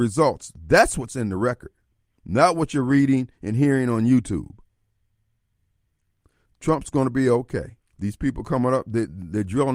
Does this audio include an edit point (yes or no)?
yes